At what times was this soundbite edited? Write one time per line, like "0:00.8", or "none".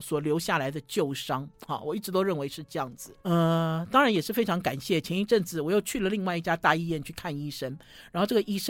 0:03.2